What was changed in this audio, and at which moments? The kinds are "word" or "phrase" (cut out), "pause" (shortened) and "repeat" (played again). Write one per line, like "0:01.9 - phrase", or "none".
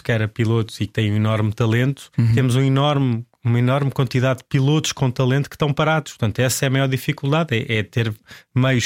0:02.1 - pause

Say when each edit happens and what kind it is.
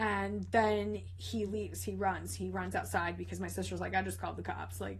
none

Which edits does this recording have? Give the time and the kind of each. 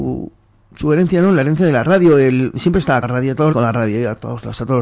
0:03.0 - word
0:03.5 - word

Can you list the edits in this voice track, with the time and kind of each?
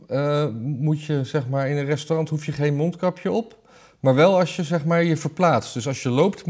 none

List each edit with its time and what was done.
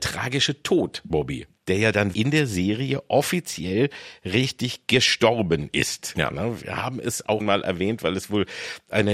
0:01.1 - word
0:02.1 - word
0:07.4 - word

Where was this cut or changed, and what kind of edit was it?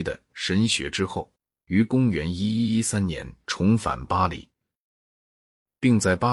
none

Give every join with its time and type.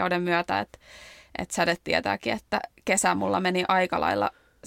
none

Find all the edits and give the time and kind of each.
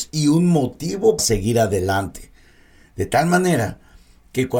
0:01.2 - word

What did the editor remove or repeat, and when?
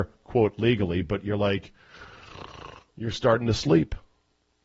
none

